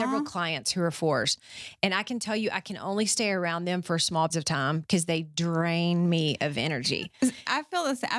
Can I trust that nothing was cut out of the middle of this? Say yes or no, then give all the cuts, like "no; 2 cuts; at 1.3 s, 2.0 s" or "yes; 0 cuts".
no; 1 cut; at 4.3 s